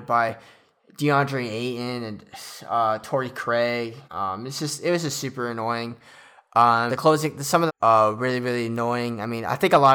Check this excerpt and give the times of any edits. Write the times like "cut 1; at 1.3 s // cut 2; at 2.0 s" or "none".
cut 1; at 4.0 s // cut 2; at 6.9 s // cut 3; at 7.7 s